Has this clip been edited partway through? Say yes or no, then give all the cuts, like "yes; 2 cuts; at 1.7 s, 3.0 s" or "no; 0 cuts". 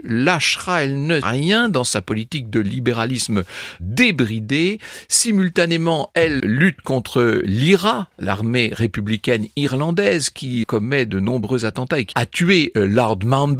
yes; 4 cuts; at 1.2 s, 6.4 s, 10.6 s, 12.1 s